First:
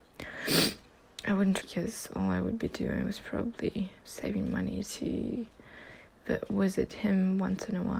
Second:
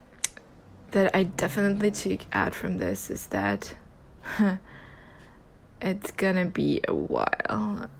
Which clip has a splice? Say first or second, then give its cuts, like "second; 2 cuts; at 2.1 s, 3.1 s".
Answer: first; 2 cuts; at 1.6 s, 4.0 s